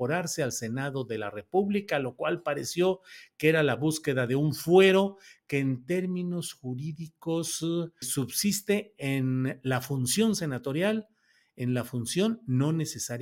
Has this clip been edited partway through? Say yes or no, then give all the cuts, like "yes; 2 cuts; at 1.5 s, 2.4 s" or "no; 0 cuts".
yes; 1 cut; at 8.0 s